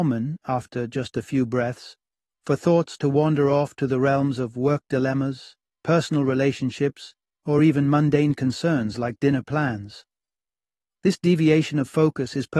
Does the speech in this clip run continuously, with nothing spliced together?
yes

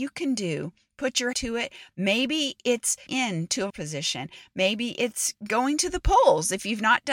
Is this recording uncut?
no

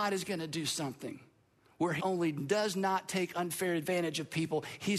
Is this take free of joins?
no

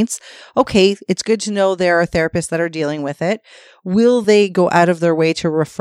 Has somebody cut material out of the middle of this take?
no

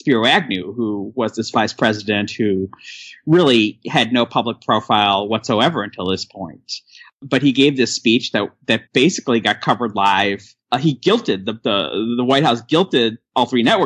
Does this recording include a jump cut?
yes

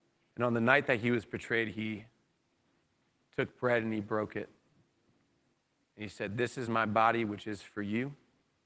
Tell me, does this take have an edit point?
no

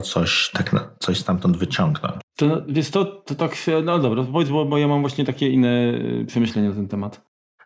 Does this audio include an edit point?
no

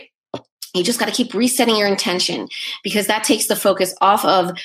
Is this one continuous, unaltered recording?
yes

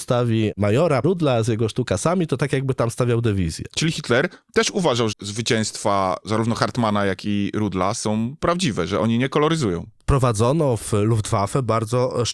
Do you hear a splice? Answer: yes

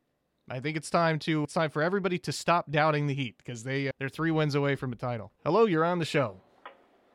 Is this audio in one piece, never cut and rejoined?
no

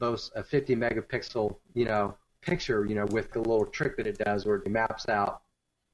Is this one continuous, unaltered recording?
no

